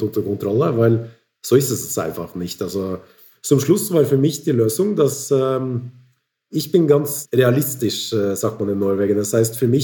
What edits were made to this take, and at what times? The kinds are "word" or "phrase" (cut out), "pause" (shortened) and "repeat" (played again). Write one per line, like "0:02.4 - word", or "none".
none